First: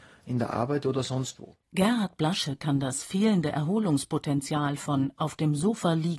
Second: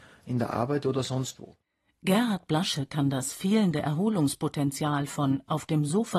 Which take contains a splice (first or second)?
first